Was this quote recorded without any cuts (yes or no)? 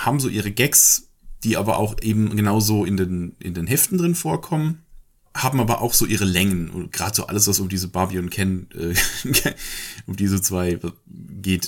yes